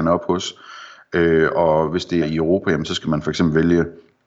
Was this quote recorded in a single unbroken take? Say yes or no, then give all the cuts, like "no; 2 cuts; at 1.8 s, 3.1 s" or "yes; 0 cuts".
no; 1 cut; at 2.2 s